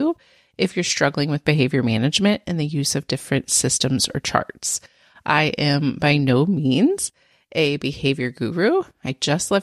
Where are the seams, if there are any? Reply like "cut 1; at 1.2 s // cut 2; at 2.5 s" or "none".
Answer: none